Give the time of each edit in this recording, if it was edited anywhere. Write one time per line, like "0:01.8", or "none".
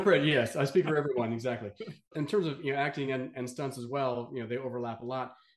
none